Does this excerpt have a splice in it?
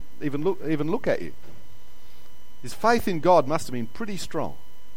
no; 0 cuts

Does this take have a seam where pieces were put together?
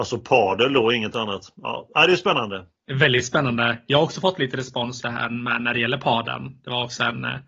yes; 1 cut; at 5.0 s

